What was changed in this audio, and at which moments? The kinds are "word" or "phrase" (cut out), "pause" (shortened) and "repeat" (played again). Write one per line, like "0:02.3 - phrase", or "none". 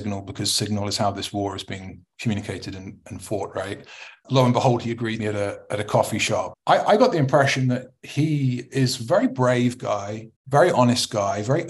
0:05.2 - phrase
0:10.4 - pause